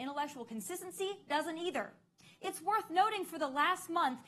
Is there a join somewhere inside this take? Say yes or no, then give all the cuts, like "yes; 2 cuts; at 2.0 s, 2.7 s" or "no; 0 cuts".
no; 0 cuts